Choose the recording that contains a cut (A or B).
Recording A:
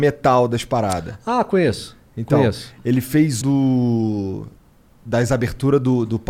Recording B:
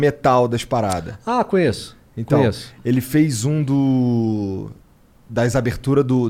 A